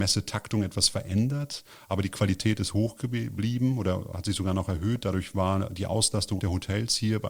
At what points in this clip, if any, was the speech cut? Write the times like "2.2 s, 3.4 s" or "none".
6.4 s